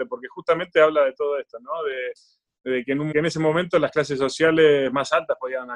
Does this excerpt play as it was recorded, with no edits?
no; 1 cut; at 3.1 s

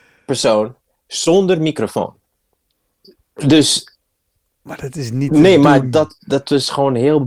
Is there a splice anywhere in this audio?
no; 0 cuts

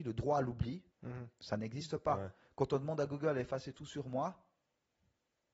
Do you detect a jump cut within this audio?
yes; 1 cut; at 0.9 s

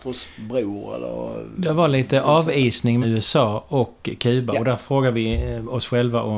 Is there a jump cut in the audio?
yes; 1 cut; at 3.0 s

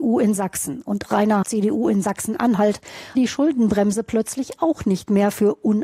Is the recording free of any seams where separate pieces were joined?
no; 3 cuts; at 1.1 s, 1.4 s, 3.2 s

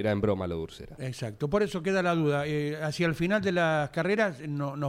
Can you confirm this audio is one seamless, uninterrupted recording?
yes; 0 cuts

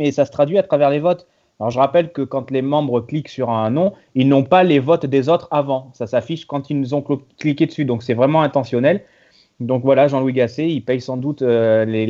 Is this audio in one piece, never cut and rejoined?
yes; 0 cuts

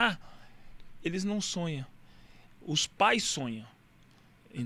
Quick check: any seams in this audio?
no; 0 cuts

